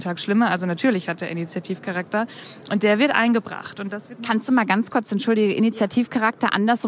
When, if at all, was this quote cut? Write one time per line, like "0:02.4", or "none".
none